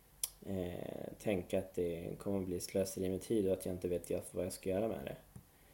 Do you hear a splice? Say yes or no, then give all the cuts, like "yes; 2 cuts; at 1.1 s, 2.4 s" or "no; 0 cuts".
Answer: no; 0 cuts